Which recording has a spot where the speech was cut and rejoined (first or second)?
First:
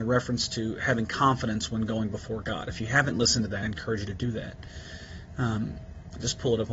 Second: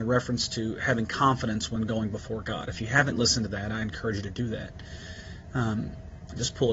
first